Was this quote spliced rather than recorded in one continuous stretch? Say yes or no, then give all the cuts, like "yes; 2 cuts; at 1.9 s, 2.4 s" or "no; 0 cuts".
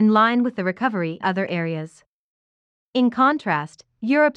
yes; 1 cut; at 1.2 s